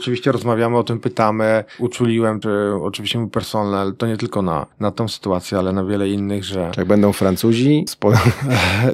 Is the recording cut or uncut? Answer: cut